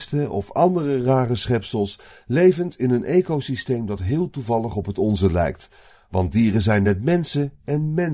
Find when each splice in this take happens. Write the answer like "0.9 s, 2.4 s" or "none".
none